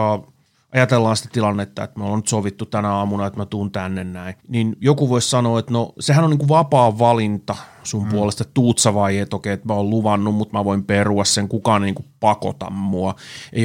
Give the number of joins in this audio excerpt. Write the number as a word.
one